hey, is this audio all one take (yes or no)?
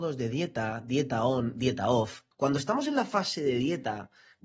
no